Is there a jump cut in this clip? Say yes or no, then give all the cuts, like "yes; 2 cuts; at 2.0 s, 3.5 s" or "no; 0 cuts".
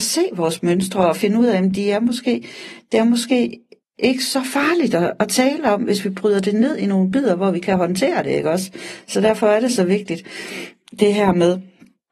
no; 0 cuts